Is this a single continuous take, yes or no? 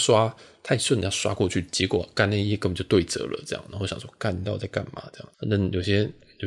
no